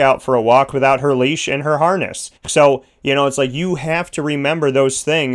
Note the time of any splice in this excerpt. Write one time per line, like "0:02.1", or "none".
0:02.4